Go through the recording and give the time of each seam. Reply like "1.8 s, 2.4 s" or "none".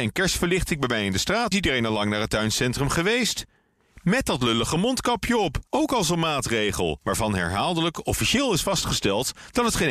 1.5 s, 5.7 s